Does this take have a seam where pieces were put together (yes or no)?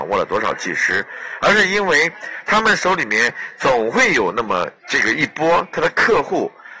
yes